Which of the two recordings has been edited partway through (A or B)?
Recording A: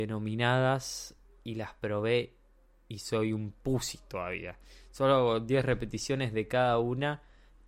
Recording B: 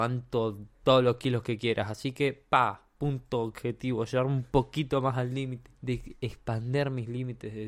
B